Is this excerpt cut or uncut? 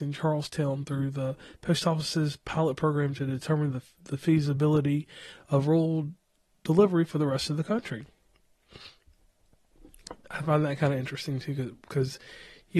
uncut